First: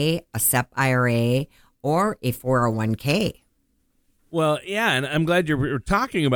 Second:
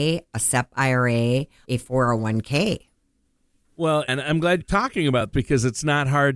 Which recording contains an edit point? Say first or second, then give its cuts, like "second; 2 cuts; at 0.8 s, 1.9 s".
second; 4 cuts; at 1.6 s, 4.1 s, 4.6 s, 5.3 s